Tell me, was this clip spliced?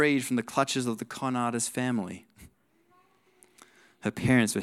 no; 0 cuts

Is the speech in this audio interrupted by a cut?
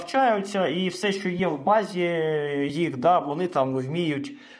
no; 0 cuts

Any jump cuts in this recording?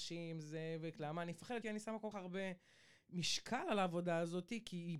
yes; 2 cuts; at 1.6 s, 2.1 s

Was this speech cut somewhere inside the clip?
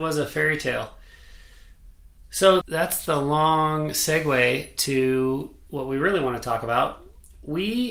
yes; 1 cut; at 2.6 s

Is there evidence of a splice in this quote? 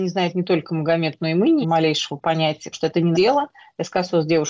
yes; 3 cuts; at 1.6 s, 2.7 s, 3.1 s

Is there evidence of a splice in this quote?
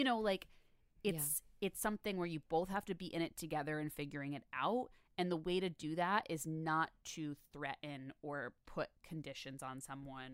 no; 0 cuts

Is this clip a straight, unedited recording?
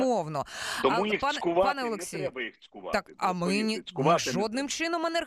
yes; 0 cuts

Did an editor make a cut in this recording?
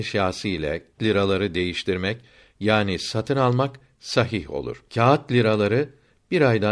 yes; 2 cuts; at 1.0 s, 4.9 s

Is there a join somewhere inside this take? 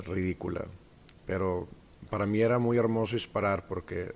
no; 0 cuts

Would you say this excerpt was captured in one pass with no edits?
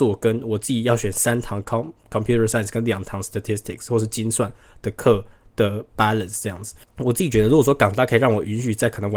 yes; 0 cuts

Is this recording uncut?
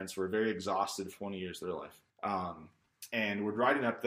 no; 2 cuts; at 1.1 s, 2.1 s

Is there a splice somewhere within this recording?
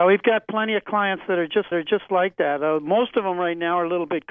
yes; 1 cut; at 1.7 s

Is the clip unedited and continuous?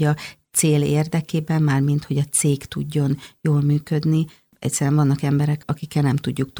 yes; 0 cuts

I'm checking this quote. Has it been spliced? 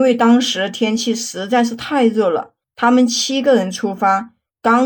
yes; 1 cut; at 2.6 s

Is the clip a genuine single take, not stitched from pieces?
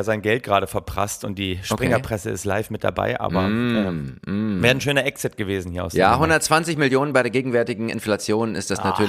yes; 0 cuts

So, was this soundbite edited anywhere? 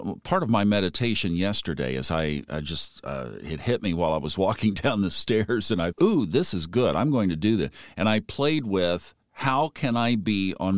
yes; 1 cut; at 5.9 s

